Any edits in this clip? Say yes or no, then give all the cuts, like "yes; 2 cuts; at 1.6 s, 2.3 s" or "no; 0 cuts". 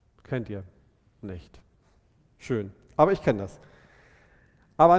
no; 0 cuts